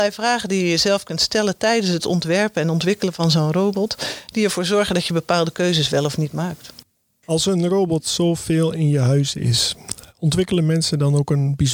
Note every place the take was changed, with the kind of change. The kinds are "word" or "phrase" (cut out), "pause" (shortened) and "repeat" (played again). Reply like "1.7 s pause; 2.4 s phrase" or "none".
none